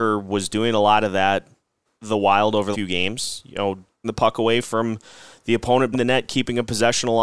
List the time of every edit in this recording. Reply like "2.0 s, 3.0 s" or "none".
1.8 s, 2.7 s, 4.0 s, 5.9 s